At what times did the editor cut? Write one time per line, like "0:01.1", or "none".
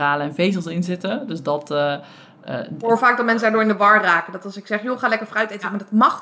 none